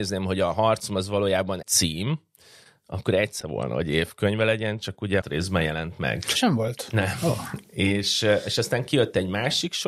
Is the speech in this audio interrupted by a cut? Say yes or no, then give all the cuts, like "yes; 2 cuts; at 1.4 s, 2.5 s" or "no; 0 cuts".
yes; 4 cuts; at 1.6 s, 3.4 s, 5.2 s, 6.4 s